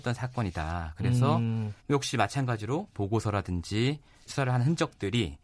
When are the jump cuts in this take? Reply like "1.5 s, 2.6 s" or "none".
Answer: 1.8 s, 2.9 s, 4.3 s